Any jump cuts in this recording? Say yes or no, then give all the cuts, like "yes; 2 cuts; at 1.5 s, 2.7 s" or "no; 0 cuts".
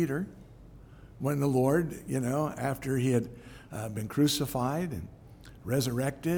no; 0 cuts